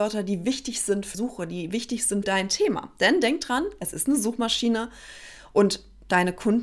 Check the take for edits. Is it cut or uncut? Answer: cut